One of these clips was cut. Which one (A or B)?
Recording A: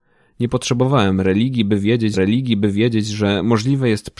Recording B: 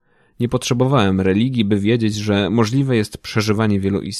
A